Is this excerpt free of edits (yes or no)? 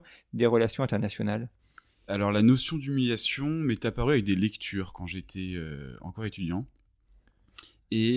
no